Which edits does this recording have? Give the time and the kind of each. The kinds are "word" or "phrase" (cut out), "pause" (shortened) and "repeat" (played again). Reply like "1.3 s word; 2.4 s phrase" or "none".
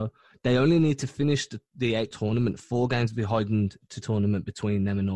2.1 s word; 4.0 s phrase

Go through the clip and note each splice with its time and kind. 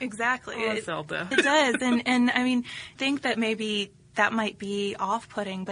1.3 s word; 3.0 s word

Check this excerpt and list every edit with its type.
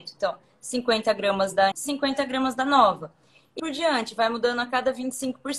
1.7 s word; 3.6 s word

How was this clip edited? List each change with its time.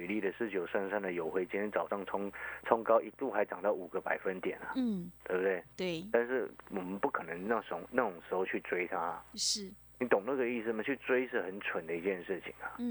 5.2 s pause

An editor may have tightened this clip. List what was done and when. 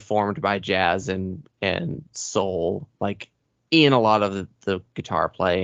none

